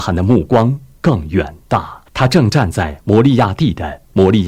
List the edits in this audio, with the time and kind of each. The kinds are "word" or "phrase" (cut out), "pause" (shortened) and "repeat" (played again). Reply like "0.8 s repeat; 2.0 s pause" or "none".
2.1 s pause